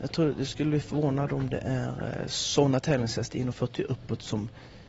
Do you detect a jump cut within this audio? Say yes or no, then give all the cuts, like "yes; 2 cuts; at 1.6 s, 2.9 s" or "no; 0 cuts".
no; 0 cuts